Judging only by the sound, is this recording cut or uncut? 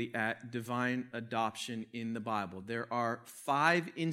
uncut